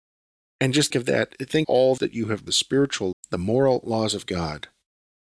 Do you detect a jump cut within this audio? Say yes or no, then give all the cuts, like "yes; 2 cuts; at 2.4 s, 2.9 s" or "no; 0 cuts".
yes; 5 cuts; at 0.9 s, 1.6 s, 2.0 s, 2.5 s, 3.1 s